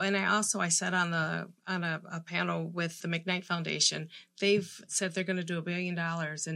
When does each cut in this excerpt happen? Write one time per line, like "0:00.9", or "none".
0:03.0